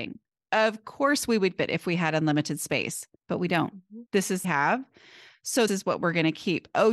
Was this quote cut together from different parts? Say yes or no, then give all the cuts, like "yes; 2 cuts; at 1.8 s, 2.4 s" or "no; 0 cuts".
yes; 5 cuts; at 1.6 s, 3.2 s, 4.1 s, 4.4 s, 5.7 s